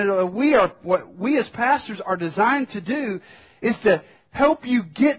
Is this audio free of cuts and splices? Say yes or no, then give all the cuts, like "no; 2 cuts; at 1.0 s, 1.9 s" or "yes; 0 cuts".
yes; 0 cuts